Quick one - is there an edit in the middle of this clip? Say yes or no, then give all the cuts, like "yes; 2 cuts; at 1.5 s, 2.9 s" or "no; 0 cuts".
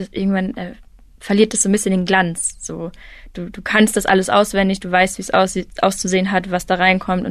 no; 0 cuts